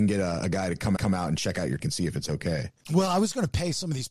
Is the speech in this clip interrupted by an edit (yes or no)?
yes